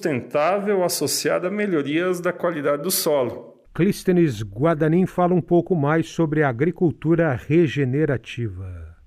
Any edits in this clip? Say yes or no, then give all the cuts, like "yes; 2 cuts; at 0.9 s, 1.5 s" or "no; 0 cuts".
yes; 1 cut; at 3.6 s